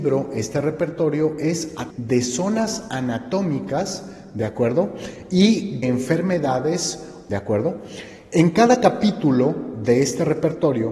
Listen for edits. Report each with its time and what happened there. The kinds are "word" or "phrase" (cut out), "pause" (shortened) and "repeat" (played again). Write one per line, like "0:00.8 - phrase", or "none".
0:01.9 - word
0:05.8 - word
0:07.3 - phrase